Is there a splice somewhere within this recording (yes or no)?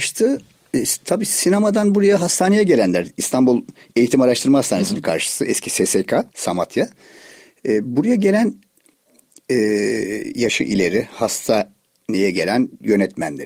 yes